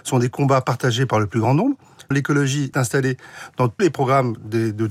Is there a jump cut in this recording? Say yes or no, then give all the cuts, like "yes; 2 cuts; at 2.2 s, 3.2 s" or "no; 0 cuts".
yes; 3 cuts; at 2.1 s, 2.7 s, 3.8 s